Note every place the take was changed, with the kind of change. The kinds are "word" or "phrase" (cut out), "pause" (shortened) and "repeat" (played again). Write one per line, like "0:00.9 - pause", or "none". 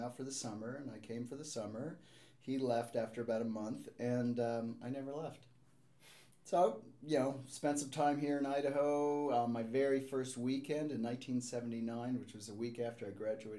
0:06.3 - pause